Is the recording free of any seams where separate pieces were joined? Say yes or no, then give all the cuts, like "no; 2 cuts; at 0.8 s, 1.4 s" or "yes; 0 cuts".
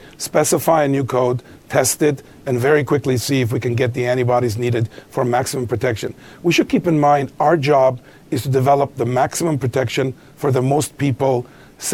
yes; 0 cuts